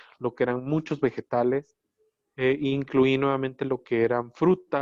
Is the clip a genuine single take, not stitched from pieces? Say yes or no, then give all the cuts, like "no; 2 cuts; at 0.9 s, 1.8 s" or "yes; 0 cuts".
yes; 0 cuts